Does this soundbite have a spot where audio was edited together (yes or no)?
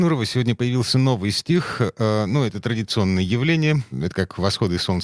no